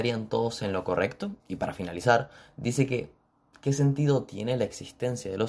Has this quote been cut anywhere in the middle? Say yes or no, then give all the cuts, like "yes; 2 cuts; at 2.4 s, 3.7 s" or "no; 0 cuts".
yes; 1 cut; at 1.4 s